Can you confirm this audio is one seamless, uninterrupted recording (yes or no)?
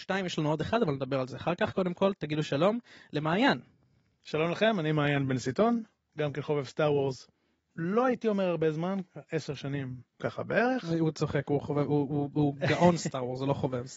no